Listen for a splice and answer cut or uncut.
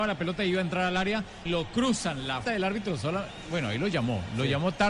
cut